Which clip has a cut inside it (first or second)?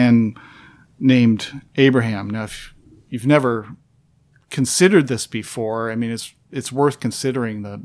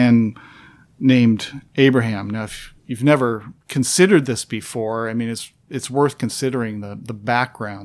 second